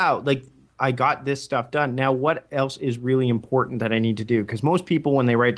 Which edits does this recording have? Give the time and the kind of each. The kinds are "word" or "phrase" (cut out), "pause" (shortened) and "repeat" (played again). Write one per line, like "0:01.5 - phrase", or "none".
none

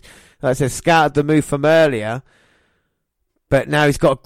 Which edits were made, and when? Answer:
none

